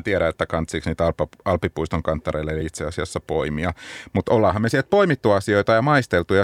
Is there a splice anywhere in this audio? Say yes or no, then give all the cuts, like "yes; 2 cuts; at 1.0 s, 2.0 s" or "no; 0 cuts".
no; 0 cuts